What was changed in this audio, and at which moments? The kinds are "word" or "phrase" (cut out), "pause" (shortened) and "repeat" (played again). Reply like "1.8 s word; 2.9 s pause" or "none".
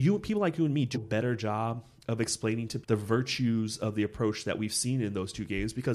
0.9 s phrase; 2.8 s word